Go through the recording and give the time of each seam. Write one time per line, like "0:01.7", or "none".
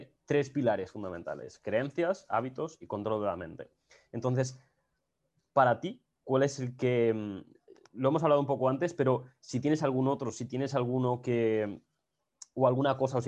none